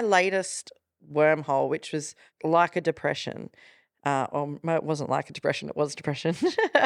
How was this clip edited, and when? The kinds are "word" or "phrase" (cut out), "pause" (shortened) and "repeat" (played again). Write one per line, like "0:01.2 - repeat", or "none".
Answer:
none